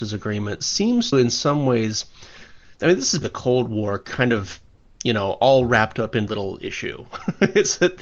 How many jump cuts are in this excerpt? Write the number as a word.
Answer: four